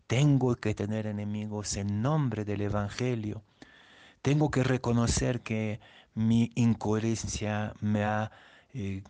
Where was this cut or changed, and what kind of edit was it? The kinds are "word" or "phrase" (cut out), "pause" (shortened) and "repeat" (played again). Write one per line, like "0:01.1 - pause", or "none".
none